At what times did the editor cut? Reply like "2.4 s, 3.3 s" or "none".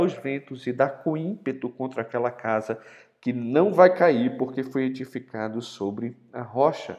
none